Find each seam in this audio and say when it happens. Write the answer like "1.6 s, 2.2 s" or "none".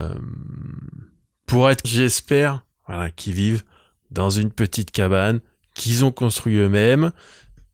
1.8 s, 2.7 s

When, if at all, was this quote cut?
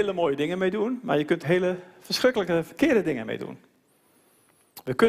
1.4 s

